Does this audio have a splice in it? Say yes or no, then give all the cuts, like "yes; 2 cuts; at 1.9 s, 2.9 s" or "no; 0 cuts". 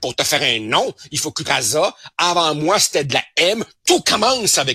yes; 1 cut; at 1.4 s